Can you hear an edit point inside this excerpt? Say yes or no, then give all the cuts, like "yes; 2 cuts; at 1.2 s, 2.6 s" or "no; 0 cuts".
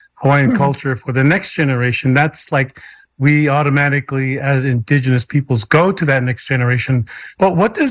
no; 0 cuts